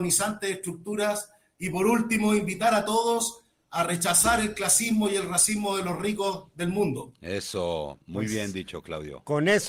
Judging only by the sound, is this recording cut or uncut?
uncut